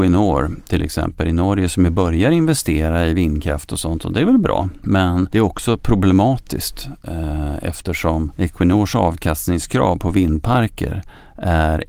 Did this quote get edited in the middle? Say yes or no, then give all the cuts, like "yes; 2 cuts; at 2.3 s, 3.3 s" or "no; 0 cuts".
no; 0 cuts